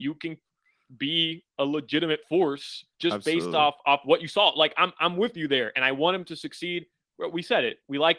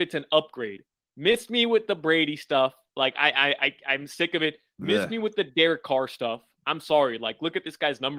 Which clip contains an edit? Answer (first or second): first